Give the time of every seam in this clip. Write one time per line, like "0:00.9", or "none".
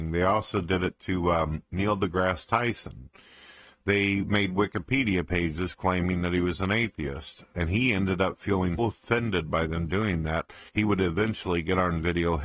0:01.7
0:08.8
0:10.7